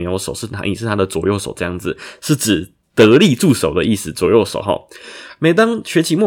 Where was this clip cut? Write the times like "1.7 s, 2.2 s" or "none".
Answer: none